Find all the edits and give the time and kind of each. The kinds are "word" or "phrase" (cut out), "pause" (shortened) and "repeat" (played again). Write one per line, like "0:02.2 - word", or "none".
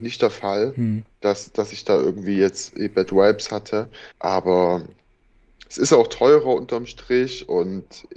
0:04.1 - pause

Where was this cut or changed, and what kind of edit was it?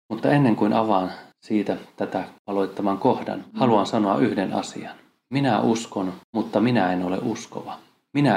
0:01.3 - pause
0:02.4 - pause
0:06.2 - pause

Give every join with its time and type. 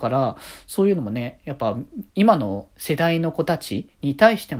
0:02.1 - pause

